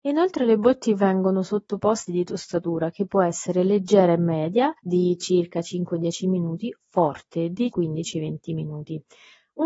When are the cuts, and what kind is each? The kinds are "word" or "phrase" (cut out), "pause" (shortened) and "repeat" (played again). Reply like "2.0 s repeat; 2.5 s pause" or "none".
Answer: 2.1 s phrase; 4.8 s pause; 6.8 s word; 7.7 s word